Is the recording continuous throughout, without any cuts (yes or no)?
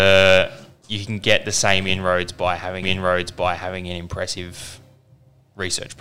no